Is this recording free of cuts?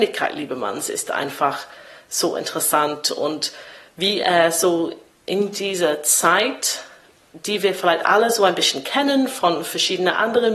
yes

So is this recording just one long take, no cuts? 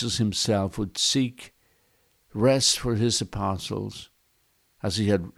yes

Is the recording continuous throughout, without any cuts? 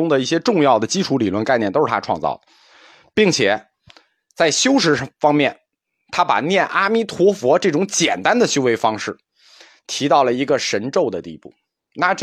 yes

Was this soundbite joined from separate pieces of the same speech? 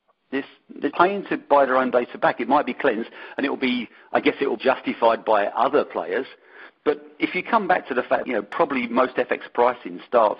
yes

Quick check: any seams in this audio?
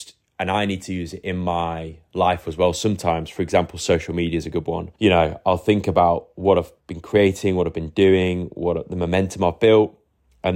yes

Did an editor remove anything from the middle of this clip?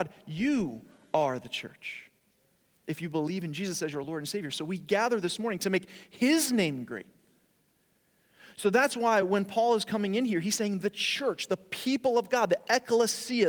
no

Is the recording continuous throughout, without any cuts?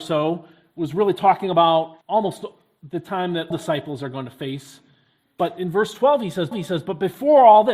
no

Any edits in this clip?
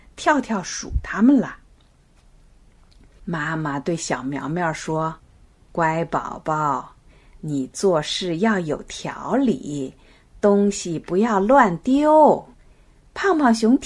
yes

